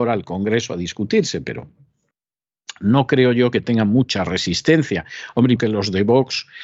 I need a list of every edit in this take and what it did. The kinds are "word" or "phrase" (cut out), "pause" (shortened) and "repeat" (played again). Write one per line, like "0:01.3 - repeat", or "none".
0:05.6 - word